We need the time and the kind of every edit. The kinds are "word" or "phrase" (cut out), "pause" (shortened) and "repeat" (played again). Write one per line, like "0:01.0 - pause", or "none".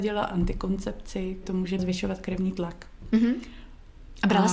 0:01.4 - word
0:01.8 - phrase